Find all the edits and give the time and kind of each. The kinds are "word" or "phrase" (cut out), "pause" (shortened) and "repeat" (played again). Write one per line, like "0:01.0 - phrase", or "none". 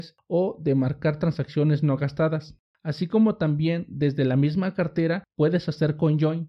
none